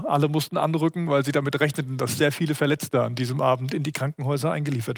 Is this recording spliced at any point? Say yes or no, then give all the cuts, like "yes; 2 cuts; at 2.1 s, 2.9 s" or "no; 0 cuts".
no; 0 cuts